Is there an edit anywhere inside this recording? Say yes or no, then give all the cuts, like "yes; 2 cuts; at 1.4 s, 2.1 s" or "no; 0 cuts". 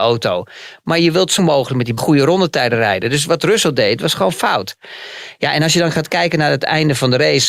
yes; 2 cuts; at 1.4 s, 2.0 s